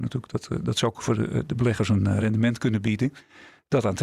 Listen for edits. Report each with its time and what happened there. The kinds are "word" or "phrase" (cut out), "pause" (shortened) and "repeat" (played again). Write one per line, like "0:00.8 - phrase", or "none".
none